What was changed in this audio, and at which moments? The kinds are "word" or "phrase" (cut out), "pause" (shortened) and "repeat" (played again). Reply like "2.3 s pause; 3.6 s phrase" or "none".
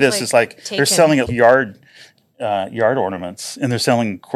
1.3 s word